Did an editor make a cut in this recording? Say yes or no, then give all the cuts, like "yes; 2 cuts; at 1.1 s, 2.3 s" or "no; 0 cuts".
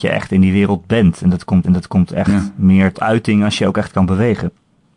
yes; 2 cuts; at 1.6 s, 2.9 s